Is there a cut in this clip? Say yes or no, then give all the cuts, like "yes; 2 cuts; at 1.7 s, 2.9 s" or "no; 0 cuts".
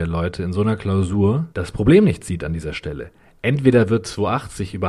yes; 1 cut; at 1.5 s